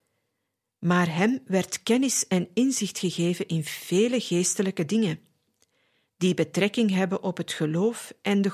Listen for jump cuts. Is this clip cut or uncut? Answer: uncut